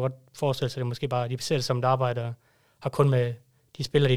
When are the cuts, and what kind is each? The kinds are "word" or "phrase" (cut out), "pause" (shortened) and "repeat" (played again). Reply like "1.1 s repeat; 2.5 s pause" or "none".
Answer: none